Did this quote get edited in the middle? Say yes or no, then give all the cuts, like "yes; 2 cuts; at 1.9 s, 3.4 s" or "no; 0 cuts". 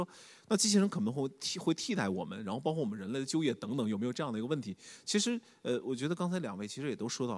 no; 0 cuts